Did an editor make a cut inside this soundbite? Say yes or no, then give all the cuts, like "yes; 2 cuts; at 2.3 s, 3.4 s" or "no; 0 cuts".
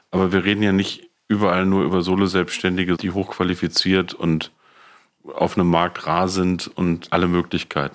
no; 0 cuts